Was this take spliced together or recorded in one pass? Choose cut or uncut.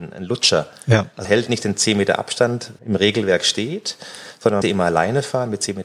cut